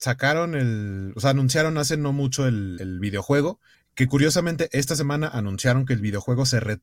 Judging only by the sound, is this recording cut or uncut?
uncut